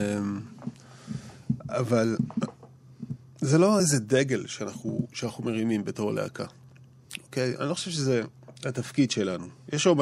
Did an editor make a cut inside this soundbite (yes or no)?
no